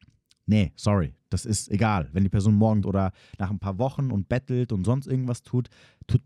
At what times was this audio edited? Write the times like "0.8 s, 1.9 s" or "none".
2.8 s

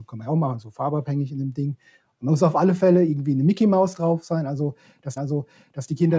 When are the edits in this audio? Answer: 5.2 s

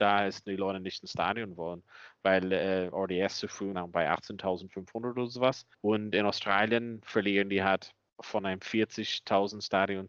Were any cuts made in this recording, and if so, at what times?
3.7 s, 5.7 s, 8.1 s

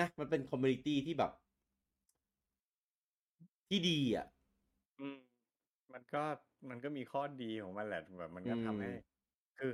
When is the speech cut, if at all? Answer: none

